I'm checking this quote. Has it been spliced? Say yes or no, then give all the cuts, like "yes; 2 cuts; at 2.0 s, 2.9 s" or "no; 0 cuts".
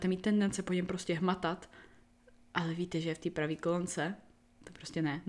no; 0 cuts